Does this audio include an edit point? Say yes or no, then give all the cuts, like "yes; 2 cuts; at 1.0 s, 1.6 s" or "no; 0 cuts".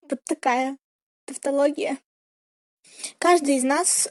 no; 0 cuts